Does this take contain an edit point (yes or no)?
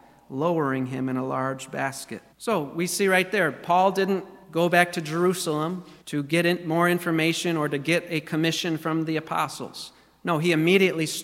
yes